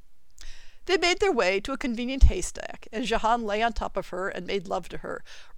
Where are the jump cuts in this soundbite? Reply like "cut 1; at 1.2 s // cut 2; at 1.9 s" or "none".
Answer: none